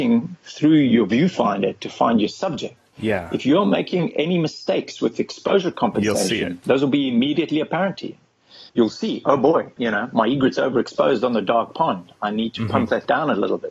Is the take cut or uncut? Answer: cut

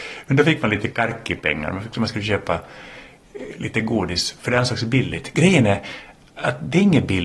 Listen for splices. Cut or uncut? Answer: uncut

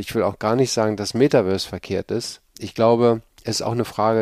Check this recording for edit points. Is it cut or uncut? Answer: uncut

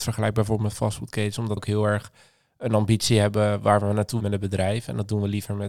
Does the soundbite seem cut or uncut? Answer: cut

